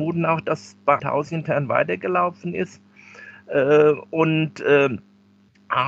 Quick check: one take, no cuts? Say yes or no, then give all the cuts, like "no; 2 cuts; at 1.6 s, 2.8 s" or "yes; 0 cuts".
no; 1 cut; at 1.0 s